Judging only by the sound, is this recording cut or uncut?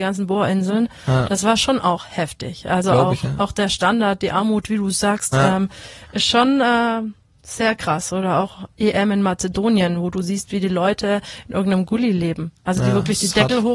uncut